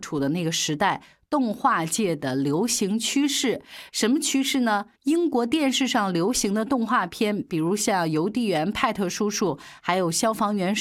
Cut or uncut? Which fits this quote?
cut